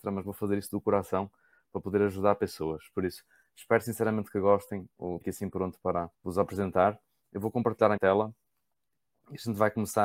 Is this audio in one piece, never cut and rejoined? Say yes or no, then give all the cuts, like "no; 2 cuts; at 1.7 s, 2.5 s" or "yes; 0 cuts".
no; 3 cuts; at 5.2 s, 6.1 s, 8.0 s